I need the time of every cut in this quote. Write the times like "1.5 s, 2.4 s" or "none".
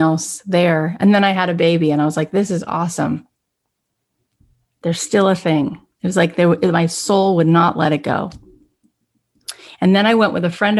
none